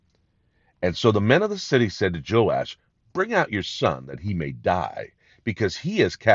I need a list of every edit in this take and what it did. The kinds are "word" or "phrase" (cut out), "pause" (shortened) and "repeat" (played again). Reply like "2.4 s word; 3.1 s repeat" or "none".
none